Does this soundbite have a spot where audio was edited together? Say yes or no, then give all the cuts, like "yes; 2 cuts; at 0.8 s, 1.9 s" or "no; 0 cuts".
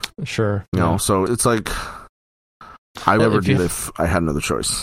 yes; 3 cuts; at 1.3 s, 3.2 s, 3.6 s